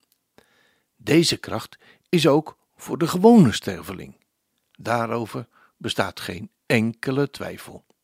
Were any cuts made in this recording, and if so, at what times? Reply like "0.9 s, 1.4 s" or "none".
none